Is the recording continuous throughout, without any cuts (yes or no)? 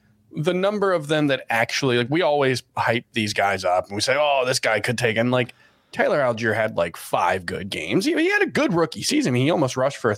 yes